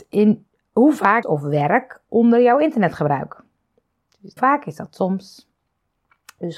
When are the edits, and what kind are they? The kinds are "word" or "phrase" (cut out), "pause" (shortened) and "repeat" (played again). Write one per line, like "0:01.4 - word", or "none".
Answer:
0:01.2 - phrase
0:04.4 - phrase